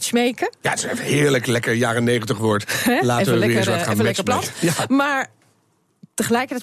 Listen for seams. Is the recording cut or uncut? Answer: uncut